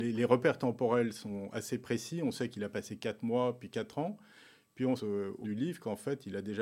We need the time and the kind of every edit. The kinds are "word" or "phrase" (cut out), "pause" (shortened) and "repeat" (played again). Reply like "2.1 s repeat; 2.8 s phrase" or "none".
5.0 s phrase; 5.4 s word

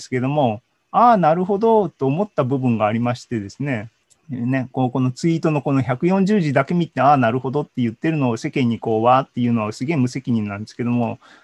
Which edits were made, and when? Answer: 4.0 s pause

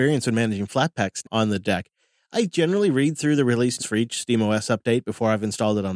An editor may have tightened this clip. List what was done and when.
1.2 s word; 3.8 s word

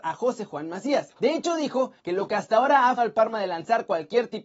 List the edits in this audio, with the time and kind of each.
1.1 s pause; 2.0 s pause; 3.0 s word

